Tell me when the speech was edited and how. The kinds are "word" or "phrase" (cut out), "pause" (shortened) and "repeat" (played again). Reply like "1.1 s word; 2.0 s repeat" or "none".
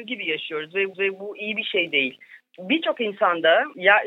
0.9 s repeat